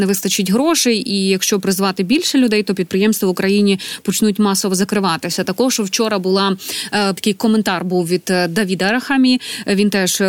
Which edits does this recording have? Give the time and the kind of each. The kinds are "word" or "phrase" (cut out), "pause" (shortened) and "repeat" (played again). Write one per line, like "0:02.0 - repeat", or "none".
0:07.2 - word